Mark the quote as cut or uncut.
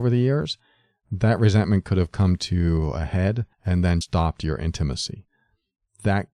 cut